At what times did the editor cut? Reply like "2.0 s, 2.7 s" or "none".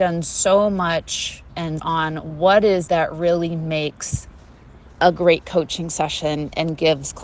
1.5 s, 1.8 s, 2.9 s